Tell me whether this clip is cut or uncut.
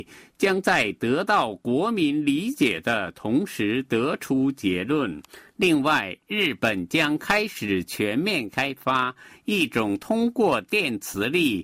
uncut